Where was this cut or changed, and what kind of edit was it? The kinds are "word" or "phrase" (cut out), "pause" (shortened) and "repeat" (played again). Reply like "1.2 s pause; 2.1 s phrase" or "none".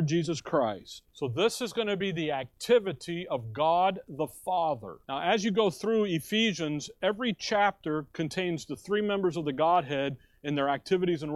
1.1 s pause; 5.0 s pause